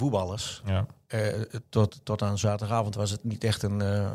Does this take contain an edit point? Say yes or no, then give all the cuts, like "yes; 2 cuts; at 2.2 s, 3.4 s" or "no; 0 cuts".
no; 0 cuts